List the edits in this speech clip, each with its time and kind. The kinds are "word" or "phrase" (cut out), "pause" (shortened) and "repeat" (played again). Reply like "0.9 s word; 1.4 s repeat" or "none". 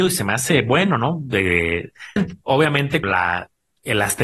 2.2 s word; 3.0 s word

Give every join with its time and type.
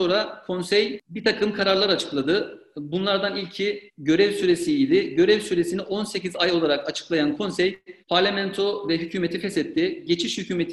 3.9 s pause; 8.0 s pause

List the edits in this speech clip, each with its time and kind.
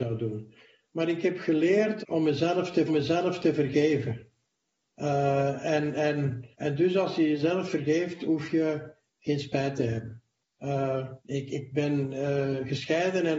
2.0 s word; 2.9 s repeat; 6.5 s pause; 11.2 s pause

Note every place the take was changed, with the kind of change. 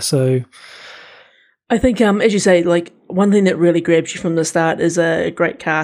none

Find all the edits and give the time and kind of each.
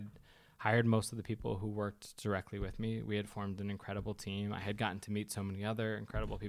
none

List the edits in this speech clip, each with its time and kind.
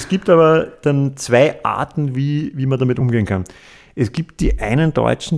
none

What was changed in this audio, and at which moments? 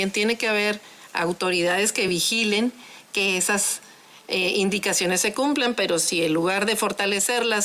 none

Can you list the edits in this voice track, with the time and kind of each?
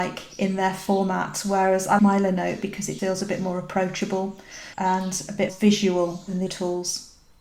2.0 s word; 3.0 s word; 4.7 s pause; 5.5 s word; 6.5 s word

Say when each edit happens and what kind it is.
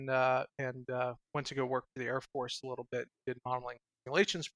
1.2 s pause

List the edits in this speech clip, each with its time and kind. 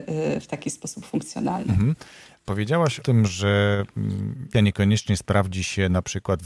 3.0 s word; 4.5 s word

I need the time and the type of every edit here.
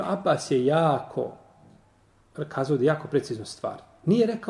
none

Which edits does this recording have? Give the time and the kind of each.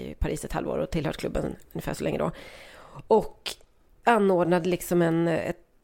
none

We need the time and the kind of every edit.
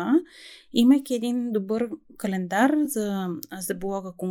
none

